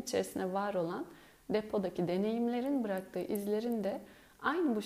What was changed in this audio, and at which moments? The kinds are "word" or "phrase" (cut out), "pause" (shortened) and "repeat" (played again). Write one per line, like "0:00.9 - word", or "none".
none